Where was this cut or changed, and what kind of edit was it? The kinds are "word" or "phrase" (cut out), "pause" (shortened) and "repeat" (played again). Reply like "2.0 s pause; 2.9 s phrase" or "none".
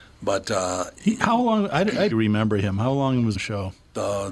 2.1 s word; 3.3 s phrase